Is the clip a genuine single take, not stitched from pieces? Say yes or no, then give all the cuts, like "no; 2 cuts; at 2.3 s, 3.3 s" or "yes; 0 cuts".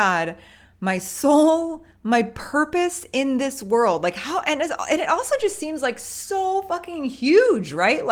yes; 0 cuts